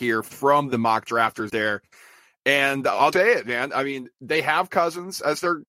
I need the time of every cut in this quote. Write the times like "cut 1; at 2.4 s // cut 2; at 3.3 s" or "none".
cut 1; at 1.5 s // cut 2; at 3.1 s // cut 3; at 4.7 s